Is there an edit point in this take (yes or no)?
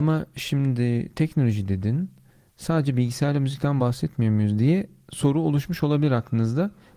no